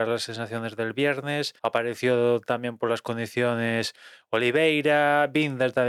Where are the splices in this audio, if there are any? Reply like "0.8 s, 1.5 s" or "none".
1.6 s